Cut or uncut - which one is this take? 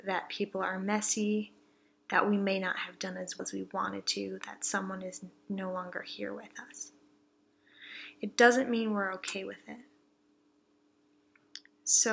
cut